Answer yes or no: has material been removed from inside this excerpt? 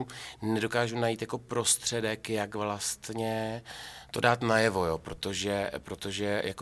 no